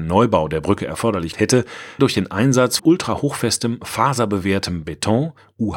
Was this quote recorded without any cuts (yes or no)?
no